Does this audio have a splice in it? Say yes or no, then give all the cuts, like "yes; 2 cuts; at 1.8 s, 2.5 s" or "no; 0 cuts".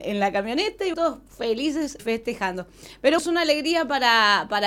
yes; 3 cuts; at 0.9 s, 2.0 s, 3.2 s